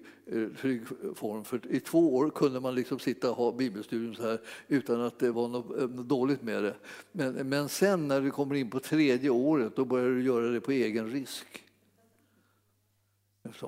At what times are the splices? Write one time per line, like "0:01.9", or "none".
0:05.3